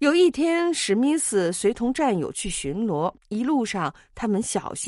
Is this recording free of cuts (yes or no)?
no